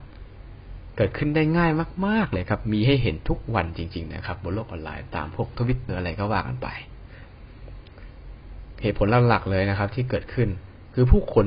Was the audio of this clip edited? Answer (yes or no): yes